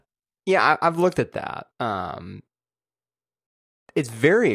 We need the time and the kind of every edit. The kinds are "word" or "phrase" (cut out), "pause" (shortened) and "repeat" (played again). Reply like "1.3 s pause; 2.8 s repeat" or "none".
1.7 s pause